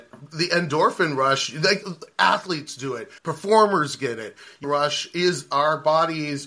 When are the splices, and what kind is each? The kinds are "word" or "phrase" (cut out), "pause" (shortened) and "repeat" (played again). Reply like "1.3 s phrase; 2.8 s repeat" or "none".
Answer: 1.8 s word; 3.2 s pause; 4.6 s phrase